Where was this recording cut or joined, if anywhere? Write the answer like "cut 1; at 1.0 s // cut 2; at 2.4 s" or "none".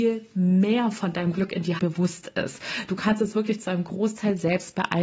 cut 1; at 1.8 s